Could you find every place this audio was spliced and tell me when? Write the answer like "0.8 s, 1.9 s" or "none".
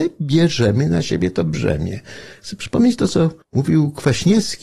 3.4 s